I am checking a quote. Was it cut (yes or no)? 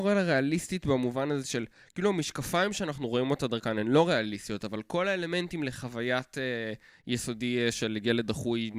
no